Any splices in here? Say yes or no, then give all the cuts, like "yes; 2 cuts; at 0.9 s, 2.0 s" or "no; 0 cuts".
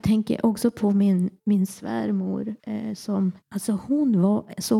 yes; 3 cuts; at 1.4 s, 2.6 s, 3.4 s